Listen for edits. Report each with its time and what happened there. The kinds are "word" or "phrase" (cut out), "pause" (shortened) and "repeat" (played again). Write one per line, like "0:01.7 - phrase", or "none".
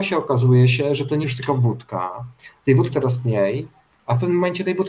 0:01.2 - word
0:02.9 - word